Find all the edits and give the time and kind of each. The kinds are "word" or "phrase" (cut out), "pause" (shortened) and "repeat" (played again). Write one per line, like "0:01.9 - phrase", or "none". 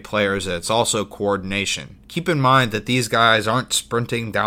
0:02.0 - pause